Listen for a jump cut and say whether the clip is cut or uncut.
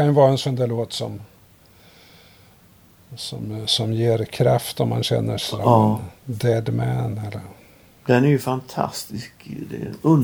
uncut